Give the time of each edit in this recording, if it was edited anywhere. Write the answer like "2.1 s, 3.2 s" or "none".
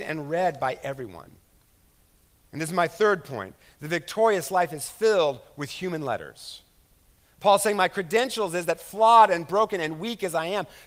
none